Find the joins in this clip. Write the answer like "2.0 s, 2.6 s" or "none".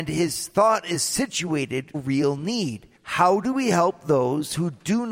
1.9 s, 3.0 s